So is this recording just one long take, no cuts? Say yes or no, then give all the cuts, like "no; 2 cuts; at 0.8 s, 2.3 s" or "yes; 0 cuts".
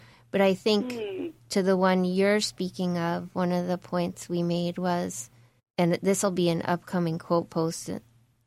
no; 1 cut; at 5.6 s